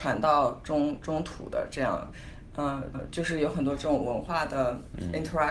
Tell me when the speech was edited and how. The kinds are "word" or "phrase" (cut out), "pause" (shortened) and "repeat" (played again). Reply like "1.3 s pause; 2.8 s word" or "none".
2.9 s repeat